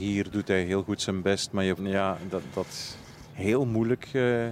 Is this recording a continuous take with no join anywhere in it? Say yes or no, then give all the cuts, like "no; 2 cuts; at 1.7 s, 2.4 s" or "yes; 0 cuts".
no; 2 cuts; at 1.8 s, 2.5 s